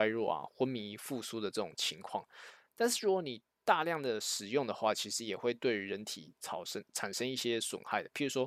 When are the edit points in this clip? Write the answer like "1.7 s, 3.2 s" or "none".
none